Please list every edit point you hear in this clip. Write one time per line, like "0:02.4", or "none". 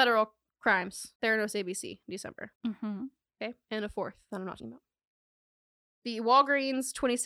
0:01.2
0:02.6
0:04.6